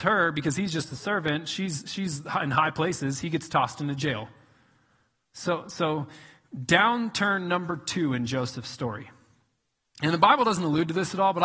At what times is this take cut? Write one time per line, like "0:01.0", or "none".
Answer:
none